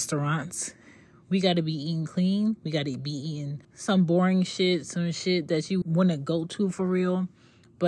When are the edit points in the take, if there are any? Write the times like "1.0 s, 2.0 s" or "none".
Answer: 3.6 s, 5.8 s